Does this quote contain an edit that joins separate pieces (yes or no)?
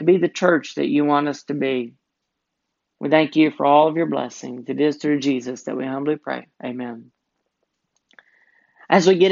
yes